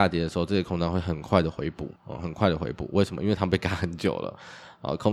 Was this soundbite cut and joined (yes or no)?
yes